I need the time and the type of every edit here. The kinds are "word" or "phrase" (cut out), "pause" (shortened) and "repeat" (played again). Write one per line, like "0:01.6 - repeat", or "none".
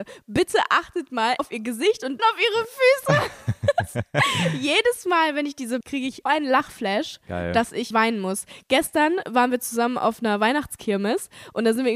0:01.4 - word
0:02.2 - word
0:05.8 - phrase
0:06.3 - word
0:07.9 - word